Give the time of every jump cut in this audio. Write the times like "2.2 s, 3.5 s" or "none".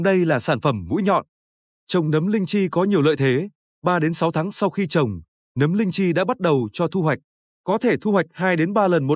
none